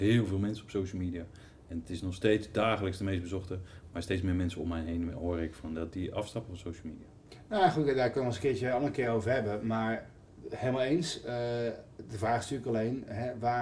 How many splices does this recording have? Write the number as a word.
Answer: zero